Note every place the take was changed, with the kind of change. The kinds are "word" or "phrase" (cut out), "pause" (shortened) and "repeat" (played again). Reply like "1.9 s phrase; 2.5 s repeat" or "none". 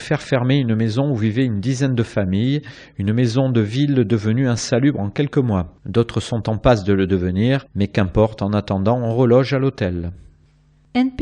none